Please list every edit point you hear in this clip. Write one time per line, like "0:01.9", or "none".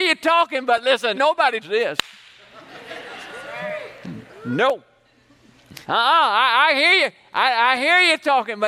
0:01.1
0:01.6
0:05.8